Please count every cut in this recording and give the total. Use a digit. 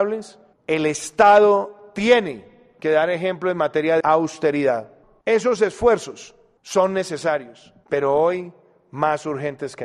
1